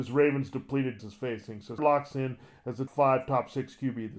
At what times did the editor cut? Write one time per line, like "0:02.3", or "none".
0:01.0
0:01.8
0:02.9